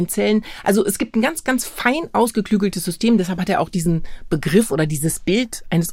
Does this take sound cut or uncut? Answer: uncut